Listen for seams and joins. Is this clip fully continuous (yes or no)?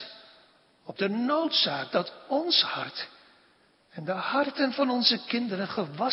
yes